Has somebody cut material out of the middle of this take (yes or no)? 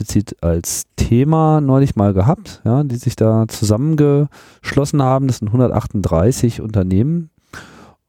no